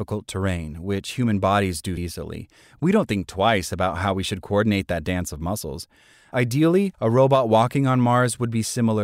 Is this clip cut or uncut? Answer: cut